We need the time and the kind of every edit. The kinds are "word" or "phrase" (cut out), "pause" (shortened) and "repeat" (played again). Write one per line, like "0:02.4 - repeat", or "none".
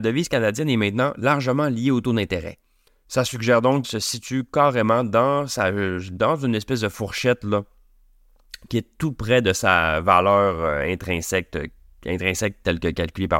0:02.9 - pause
0:03.8 - phrase